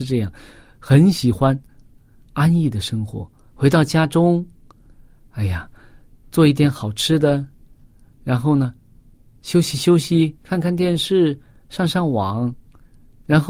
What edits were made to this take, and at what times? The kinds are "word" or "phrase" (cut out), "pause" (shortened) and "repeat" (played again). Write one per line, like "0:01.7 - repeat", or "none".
none